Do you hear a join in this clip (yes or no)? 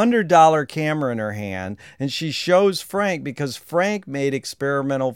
no